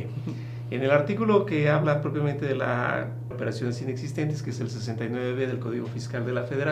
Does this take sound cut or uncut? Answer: cut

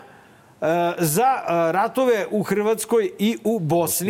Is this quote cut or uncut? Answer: uncut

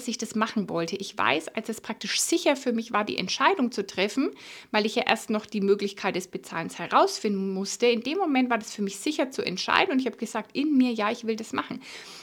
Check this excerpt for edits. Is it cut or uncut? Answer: uncut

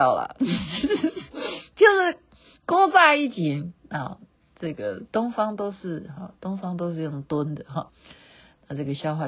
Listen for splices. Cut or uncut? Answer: cut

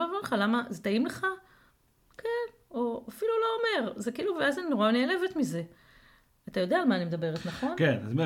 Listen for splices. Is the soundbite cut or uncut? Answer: uncut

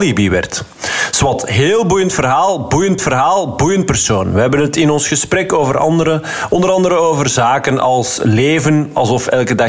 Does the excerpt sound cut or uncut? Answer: cut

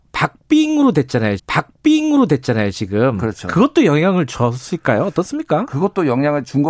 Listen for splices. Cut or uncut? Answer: cut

